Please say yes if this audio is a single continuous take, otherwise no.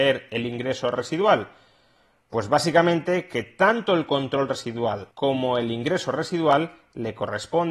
no